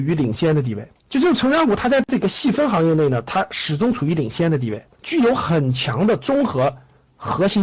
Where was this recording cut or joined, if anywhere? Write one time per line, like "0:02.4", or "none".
0:01.0
0:04.9